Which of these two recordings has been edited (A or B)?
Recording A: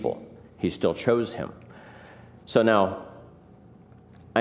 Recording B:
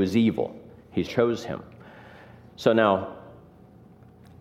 B